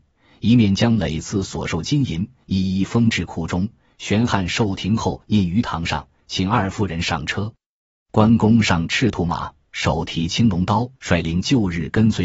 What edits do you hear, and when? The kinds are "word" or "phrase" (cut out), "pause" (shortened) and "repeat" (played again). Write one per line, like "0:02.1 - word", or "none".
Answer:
0:11.0 - pause